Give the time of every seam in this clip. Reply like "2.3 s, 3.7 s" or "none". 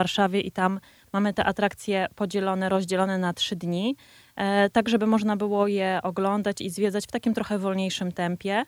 none